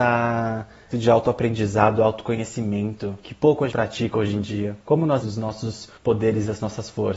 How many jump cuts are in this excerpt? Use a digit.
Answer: 6